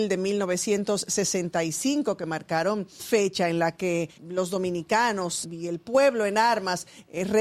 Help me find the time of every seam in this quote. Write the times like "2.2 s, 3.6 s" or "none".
3.0 s, 4.2 s, 5.4 s